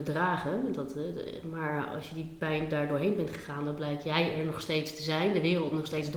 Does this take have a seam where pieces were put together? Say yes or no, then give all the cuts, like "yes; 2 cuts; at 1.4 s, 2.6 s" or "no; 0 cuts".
no; 0 cuts